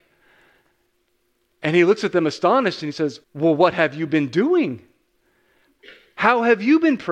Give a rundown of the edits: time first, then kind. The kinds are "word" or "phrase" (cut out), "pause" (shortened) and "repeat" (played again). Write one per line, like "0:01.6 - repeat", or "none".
0:03.2 - pause
0:06.1 - pause